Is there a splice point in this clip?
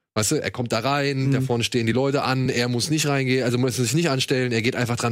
no; 0 cuts

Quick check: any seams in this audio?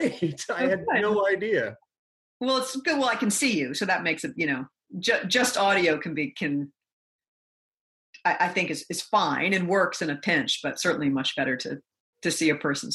no; 0 cuts

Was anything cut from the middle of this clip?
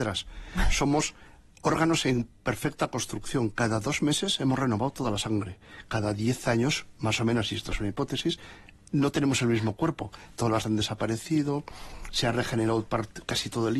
yes; 1 cut; at 10.6 s

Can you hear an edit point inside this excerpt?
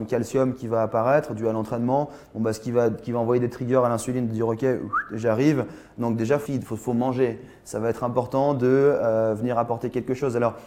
yes; 1 cut; at 6.4 s

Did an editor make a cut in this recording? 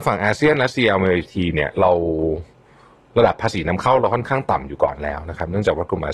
no; 0 cuts

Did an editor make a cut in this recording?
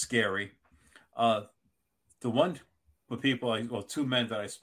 yes; 1 cut; at 3.1 s

